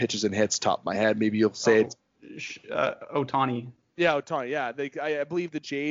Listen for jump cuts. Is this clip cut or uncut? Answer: uncut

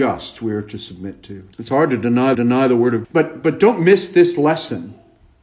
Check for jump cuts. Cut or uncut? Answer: cut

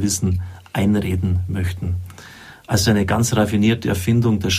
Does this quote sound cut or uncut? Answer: uncut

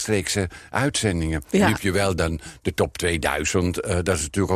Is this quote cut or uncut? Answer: uncut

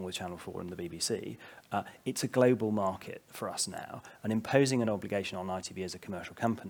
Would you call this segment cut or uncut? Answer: uncut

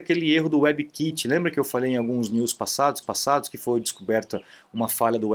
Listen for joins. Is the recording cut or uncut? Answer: cut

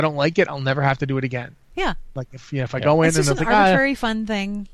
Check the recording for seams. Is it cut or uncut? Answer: cut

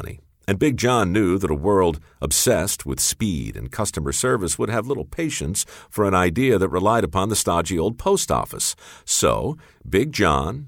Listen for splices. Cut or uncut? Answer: uncut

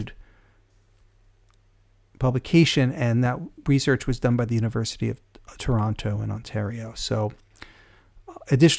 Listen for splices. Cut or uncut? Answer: uncut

